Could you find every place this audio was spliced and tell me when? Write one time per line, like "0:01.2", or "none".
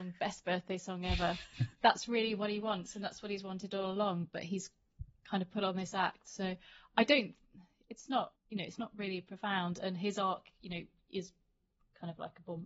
0:01.7
0:08.4